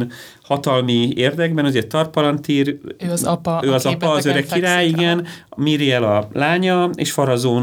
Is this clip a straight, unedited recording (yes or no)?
yes